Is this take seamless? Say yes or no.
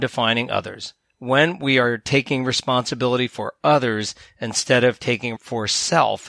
no